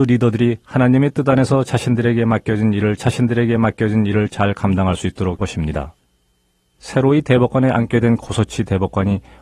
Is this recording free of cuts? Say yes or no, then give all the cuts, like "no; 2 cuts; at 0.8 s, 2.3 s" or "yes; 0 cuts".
no; 2 cuts; at 3.0 s, 5.4 s